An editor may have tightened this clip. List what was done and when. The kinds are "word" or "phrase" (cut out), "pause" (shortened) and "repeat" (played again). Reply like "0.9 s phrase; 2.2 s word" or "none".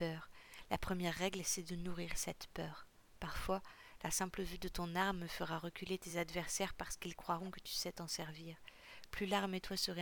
none